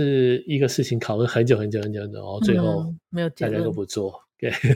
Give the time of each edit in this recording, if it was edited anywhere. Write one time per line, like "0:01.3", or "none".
none